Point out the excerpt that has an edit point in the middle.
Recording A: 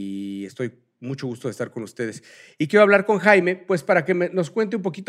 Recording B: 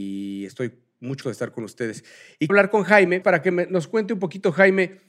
B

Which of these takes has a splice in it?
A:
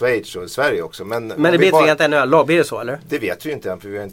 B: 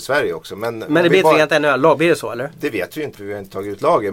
B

